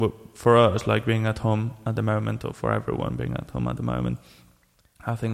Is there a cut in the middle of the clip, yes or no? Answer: no